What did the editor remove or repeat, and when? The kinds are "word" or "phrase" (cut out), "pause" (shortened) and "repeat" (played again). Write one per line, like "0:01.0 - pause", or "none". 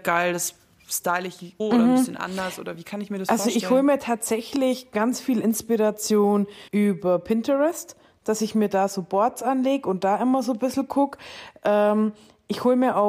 0:01.6 - word
0:06.7 - pause